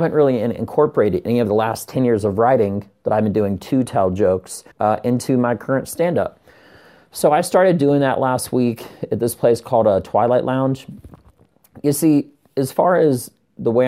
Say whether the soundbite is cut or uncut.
cut